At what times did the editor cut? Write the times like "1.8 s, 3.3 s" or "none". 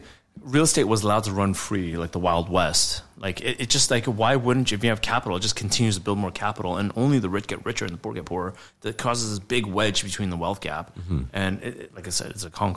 none